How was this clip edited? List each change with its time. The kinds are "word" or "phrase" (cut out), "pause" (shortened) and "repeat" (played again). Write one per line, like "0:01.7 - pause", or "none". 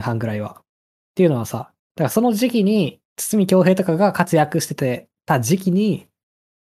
0:01.8 - pause
0:03.1 - pause